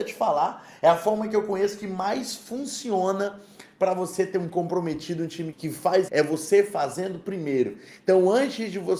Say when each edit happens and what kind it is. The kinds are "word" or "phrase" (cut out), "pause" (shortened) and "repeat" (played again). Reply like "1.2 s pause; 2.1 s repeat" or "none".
4.5 s word; 5.5 s word; 6.1 s phrase